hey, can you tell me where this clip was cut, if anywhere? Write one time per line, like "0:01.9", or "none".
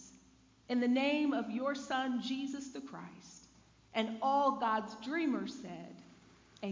none